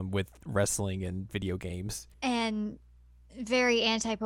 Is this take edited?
yes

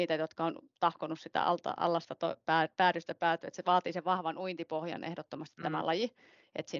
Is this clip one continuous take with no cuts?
yes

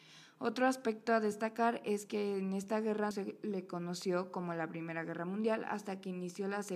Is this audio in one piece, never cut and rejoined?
no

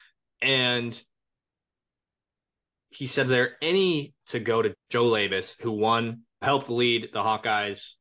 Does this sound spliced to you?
yes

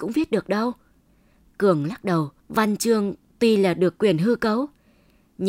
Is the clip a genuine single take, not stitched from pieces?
no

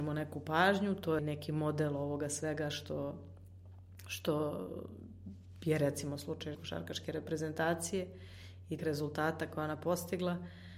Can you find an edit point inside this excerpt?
yes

